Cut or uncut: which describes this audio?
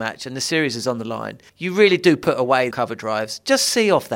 cut